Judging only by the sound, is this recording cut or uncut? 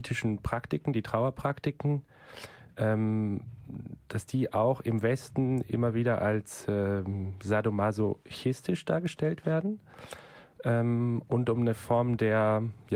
uncut